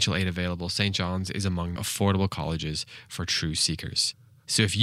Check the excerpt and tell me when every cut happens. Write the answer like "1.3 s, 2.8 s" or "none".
1.8 s